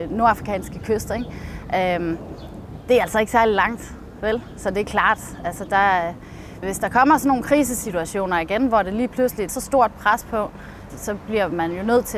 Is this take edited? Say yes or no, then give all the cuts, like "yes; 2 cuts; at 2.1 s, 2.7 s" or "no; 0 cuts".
yes; 3 cuts; at 6.6 s, 9.5 s, 10.9 s